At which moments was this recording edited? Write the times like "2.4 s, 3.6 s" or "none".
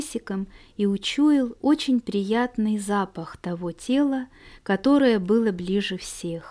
none